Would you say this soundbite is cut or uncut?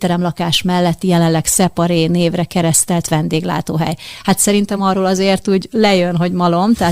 uncut